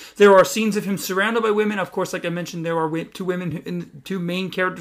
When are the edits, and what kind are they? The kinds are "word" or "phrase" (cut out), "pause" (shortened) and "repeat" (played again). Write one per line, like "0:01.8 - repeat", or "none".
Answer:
none